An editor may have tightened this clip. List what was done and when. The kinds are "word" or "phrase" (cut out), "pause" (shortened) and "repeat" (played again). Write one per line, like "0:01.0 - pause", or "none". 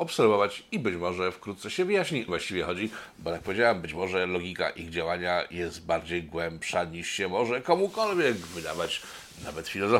0:02.3 - phrase

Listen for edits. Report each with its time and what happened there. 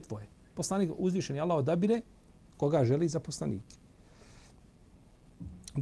none

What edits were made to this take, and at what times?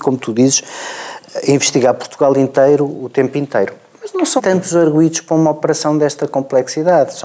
0:03.9 - pause
0:04.4 - word

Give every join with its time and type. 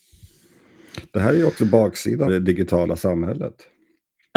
0:02.3 - word

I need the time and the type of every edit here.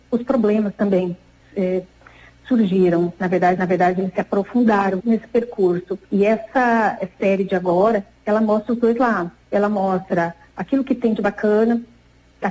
0:01.4 - word
0:03.6 - repeat
0:05.0 - word
0:06.0 - pause
0:09.4 - pause

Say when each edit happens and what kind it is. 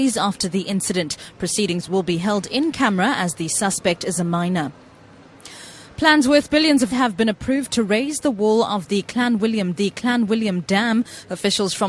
0:06.9 - word
0:09.7 - repeat

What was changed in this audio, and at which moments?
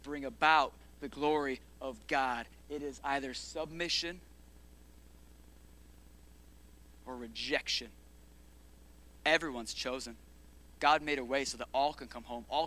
none

